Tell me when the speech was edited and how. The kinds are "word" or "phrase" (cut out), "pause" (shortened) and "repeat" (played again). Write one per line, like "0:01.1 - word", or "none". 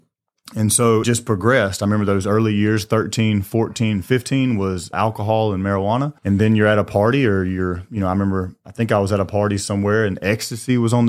0:01.0 - word
0:04.9 - word
0:06.2 - pause

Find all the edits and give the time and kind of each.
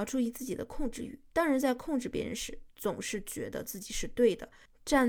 0:01.3 - pause

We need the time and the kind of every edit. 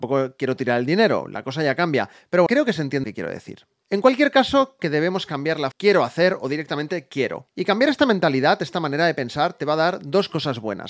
0:02.5 - word
0:03.0 - word
0:04.8 - word
0:05.7 - phrase

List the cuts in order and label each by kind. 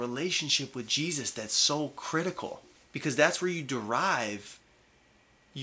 0:02.7 - pause

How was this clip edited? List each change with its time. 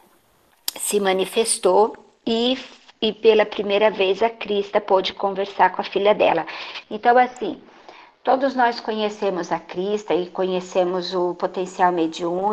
none

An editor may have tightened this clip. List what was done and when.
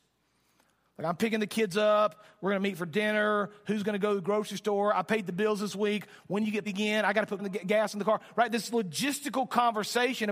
0:06.6 - word
0:07.4 - word

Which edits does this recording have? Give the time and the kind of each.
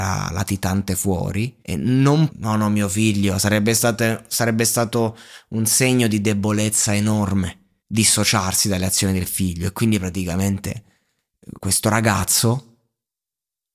0:01.6 - pause
0:02.3 - phrase
0:07.8 - pause
0:11.6 - pause

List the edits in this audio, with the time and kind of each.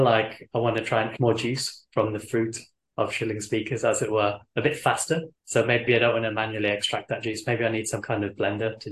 0:01.2 - word
0:02.8 - pause
0:05.4 - pause
0:05.9 - word

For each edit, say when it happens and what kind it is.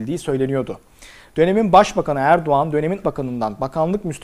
0:03.0 - word

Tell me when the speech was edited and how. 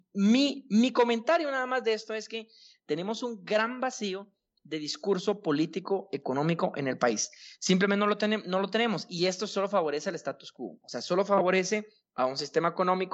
none

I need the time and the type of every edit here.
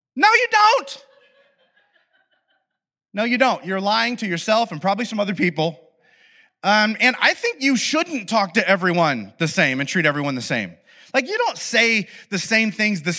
none

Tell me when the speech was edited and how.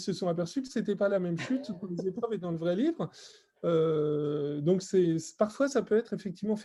none

